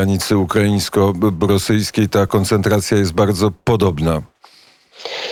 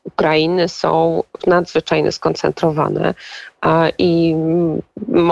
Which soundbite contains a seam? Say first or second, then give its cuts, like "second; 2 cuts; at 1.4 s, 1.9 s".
second; 1 cut; at 1.4 s